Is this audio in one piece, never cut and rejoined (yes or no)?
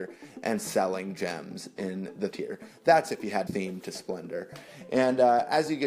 no